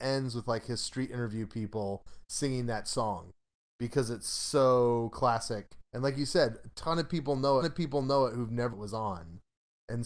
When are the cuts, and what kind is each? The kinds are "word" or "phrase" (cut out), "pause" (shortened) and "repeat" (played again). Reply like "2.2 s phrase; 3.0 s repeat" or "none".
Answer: 5.8 s pause; 7.6 s repeat; 8.7 s phrase